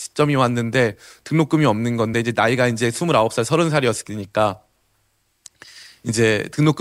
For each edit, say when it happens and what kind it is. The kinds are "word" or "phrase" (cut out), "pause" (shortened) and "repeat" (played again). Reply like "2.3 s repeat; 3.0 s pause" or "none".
none